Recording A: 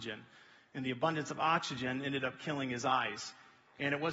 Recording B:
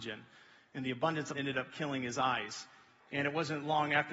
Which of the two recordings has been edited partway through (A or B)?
B